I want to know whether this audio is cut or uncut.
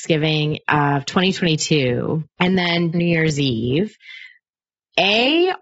cut